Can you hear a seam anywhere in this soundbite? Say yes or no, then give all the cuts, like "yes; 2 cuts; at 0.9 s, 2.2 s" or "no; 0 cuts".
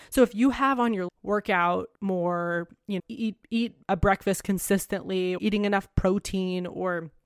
yes; 5 cuts; at 1.1 s, 1.9 s, 3.0 s, 3.8 s, 5.4 s